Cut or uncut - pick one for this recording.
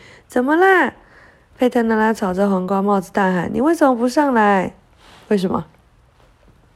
uncut